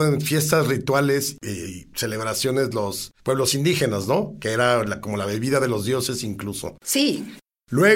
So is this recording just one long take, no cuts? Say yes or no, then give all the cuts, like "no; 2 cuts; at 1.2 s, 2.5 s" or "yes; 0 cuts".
no; 1 cut; at 3.2 s